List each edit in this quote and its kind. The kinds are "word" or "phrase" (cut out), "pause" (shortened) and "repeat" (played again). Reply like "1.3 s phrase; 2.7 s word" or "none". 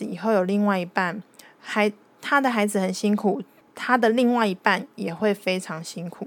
none